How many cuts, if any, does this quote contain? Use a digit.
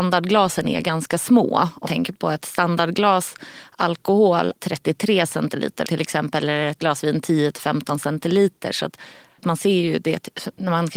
5